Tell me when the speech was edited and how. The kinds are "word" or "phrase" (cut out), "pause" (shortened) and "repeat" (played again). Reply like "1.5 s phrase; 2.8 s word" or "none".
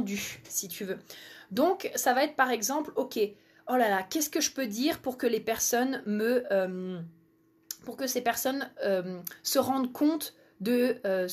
none